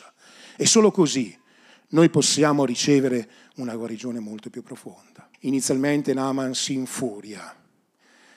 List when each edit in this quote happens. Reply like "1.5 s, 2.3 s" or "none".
5.3 s